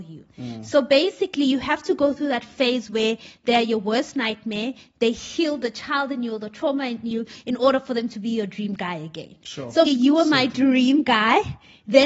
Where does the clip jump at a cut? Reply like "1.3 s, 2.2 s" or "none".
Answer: 9.9 s

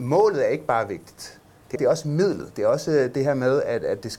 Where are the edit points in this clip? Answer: 1.8 s

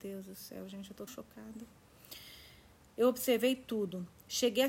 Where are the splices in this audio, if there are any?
1.1 s

